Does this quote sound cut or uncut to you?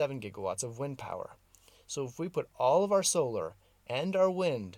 uncut